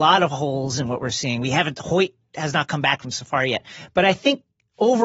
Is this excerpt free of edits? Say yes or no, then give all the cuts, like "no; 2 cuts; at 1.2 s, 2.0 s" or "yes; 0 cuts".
yes; 0 cuts